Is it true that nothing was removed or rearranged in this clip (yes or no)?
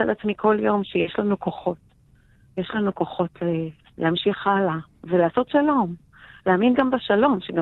yes